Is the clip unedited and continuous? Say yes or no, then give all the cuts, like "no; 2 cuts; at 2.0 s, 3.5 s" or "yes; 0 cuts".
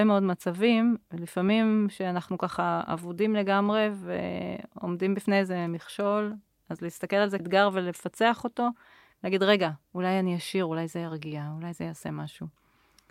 no; 1 cut; at 7.4 s